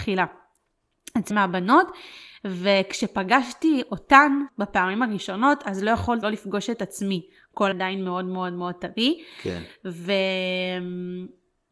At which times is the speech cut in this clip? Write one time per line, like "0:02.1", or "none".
0:01.3
0:04.5
0:06.2
0:07.7

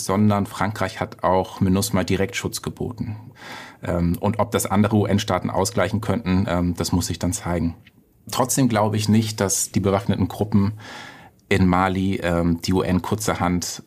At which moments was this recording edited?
none

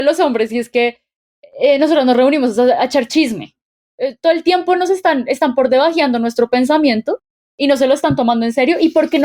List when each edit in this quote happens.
none

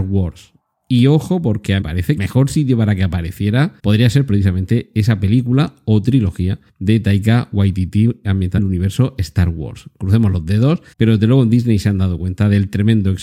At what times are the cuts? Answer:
0:01.8
0:02.2
0:03.8
0:06.7
0:08.6
0:10.9

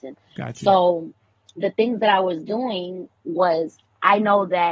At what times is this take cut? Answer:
none

